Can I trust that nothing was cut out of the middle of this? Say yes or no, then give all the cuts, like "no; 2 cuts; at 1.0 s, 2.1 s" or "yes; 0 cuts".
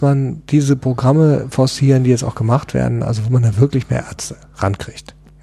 yes; 0 cuts